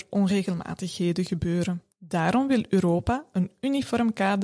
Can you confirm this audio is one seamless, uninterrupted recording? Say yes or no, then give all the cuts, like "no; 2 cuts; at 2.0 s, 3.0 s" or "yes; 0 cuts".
no; 1 cut; at 1.9 s